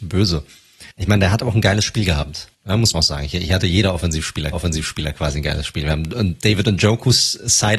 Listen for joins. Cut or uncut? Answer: cut